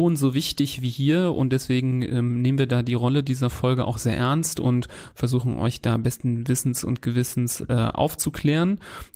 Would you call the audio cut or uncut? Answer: uncut